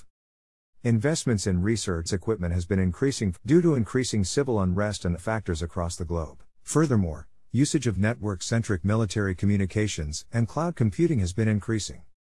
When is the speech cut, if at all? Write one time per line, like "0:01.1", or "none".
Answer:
0:02.1
0:03.4
0:05.2
0:06.5